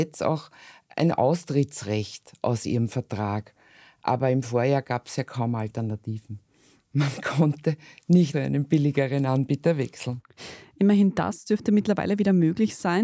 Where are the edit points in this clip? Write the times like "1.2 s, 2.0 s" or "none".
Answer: 8.3 s